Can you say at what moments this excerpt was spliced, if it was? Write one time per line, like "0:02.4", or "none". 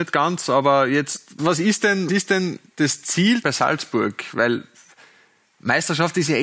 0:01.4
0:02.1
0:03.4